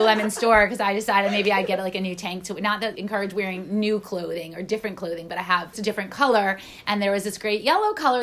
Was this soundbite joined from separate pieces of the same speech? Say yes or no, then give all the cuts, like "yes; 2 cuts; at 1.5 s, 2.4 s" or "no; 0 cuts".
yes; 2 cuts; at 3.0 s, 5.7 s